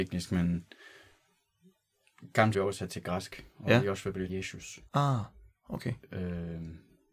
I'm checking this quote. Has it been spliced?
yes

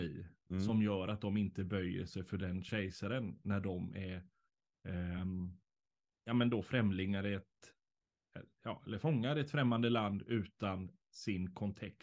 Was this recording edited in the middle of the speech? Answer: no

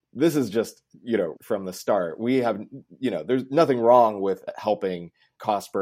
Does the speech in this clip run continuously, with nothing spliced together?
no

